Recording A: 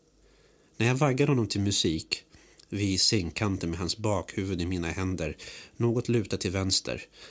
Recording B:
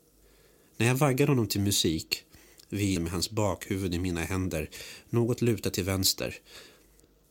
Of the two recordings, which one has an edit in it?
B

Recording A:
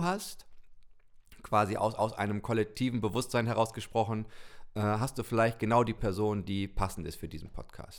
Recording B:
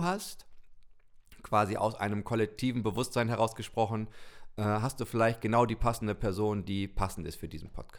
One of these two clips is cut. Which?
A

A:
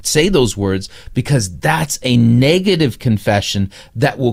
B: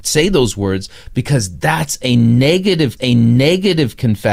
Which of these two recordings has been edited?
B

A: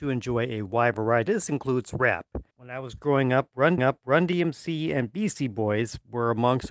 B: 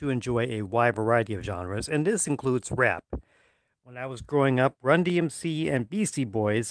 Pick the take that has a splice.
A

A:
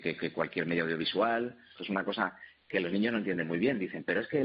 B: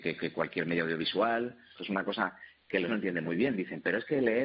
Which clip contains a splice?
B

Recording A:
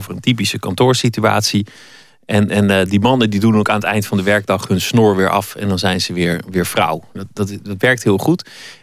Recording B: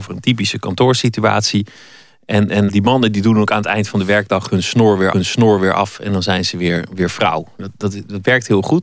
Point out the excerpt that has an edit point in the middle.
B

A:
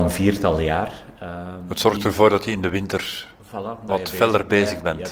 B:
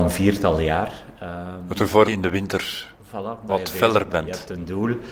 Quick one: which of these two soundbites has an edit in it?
B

